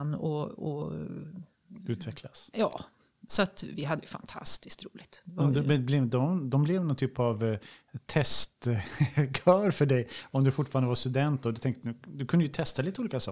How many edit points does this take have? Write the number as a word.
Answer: zero